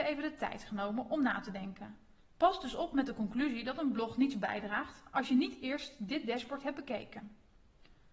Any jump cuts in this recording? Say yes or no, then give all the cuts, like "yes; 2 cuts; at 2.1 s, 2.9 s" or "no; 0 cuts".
yes; 1 cut; at 2.2 s